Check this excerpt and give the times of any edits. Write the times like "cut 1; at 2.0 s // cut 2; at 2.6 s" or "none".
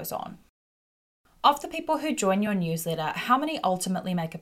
none